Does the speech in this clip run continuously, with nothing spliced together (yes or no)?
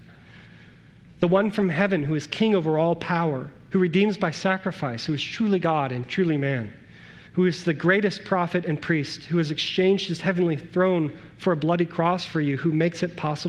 no